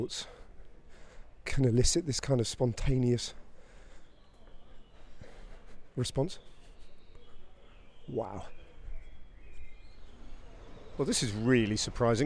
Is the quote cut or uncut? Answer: uncut